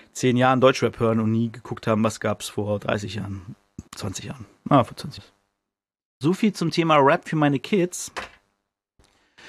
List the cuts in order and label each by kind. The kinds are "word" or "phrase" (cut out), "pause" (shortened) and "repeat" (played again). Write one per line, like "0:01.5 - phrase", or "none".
0:03.9 - pause
0:05.2 - word